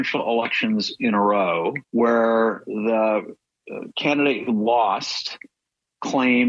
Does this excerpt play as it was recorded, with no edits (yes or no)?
no